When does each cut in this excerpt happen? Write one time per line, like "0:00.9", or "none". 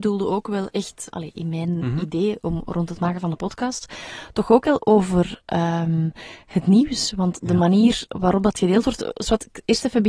0:01.1